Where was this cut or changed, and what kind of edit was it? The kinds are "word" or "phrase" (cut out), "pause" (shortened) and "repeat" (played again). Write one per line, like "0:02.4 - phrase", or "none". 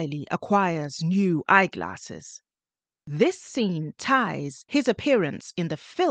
none